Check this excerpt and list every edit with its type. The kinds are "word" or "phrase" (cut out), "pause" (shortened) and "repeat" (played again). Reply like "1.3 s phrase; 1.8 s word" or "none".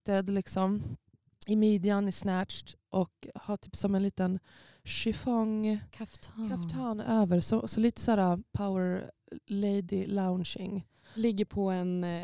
none